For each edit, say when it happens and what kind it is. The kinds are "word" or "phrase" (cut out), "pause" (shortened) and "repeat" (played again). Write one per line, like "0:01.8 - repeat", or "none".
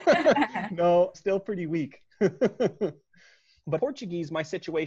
0:01.1 - word
0:03.8 - word

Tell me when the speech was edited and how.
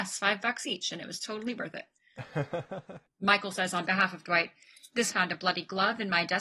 0:05.1 - phrase

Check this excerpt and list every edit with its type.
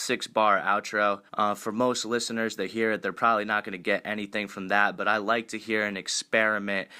0:01.3 - pause

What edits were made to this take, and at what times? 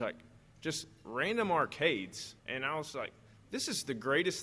0:02.4 - pause

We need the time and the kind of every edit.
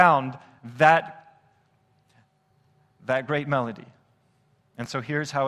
none

